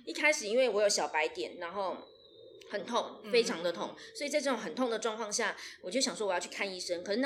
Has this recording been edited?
no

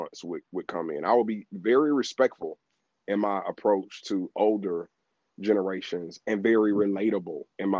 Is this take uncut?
yes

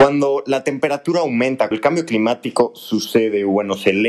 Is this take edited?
yes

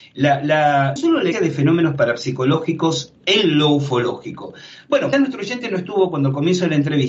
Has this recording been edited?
yes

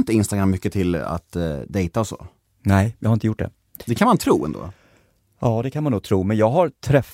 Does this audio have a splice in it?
no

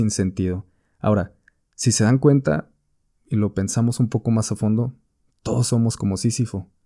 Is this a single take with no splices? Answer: yes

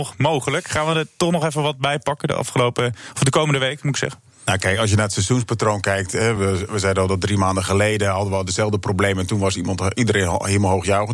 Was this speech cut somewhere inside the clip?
no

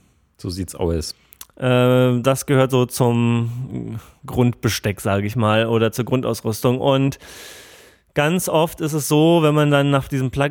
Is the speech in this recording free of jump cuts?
yes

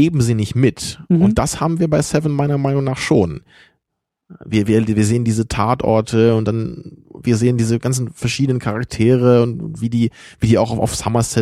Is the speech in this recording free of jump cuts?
no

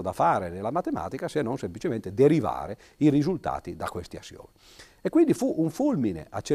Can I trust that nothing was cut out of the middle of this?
yes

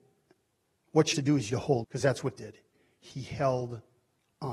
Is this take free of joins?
no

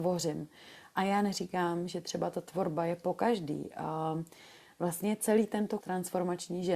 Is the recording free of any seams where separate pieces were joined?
no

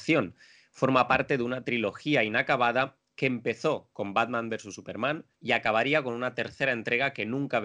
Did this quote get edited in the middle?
yes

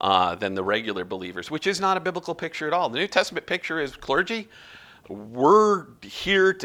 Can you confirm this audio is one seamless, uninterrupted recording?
yes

